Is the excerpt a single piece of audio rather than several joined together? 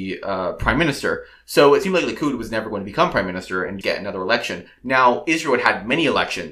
no; 1 cut; at 3.8 s

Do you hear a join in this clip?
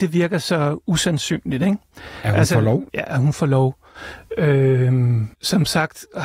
yes; 2 cuts; at 2.9 s, 5.3 s

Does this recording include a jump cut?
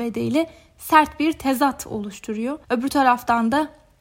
yes; 1 cut; at 2.6 s

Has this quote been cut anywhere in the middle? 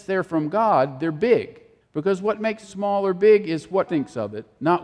yes; 3 cuts; at 1.8 s, 2.6 s, 3.9 s

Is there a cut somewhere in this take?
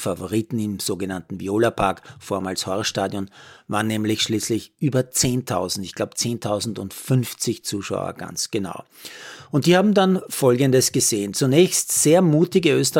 no; 0 cuts

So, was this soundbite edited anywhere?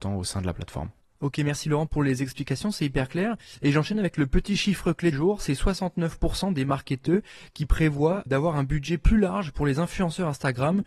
yes; 2 cuts; at 5.1 s, 8.3 s

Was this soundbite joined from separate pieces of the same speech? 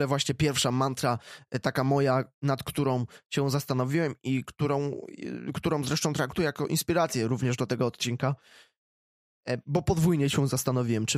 no; 0 cuts

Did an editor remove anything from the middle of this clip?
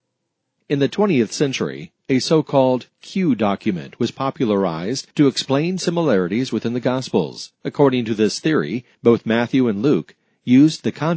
yes; 3 cuts; at 5.1 s, 7.5 s, 8.9 s

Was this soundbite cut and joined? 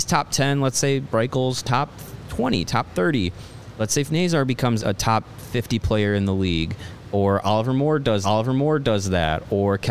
yes; 3 cuts; at 4.1 s, 4.8 s, 8.2 s

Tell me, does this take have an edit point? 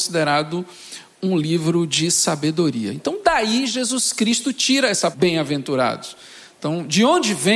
yes; 1 cut; at 5.1 s

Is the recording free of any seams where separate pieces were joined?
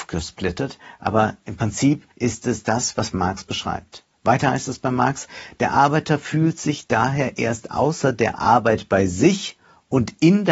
no; 1 cut; at 2.1 s

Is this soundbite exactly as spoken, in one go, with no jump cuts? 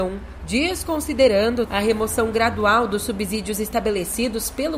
no; 1 cut; at 1.7 s

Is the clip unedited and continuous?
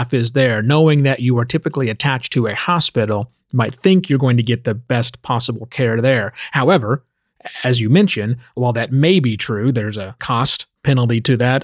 yes; 0 cuts

